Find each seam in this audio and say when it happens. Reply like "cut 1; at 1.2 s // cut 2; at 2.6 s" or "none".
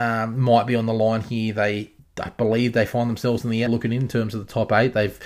cut 1; at 2.0 s // cut 2; at 3.7 s